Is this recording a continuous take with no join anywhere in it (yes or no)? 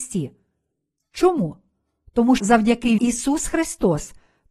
no